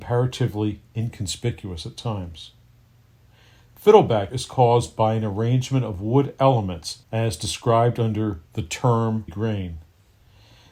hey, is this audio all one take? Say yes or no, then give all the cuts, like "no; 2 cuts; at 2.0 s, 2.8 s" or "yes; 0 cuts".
no; 4 cuts; at 4.3 s, 7.0 s, 8.5 s, 9.3 s